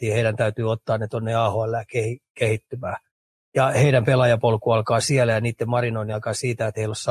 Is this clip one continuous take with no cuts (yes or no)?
yes